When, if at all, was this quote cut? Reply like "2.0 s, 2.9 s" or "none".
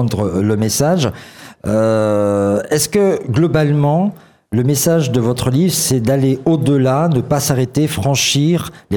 none